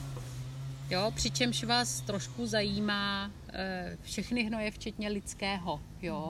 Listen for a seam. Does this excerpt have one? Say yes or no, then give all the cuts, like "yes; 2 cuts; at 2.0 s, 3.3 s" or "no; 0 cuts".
no; 0 cuts